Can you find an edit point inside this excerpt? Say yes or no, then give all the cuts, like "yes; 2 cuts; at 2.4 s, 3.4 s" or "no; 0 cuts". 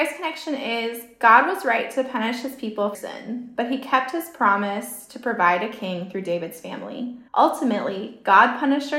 yes; 2 cuts; at 2.9 s, 7.3 s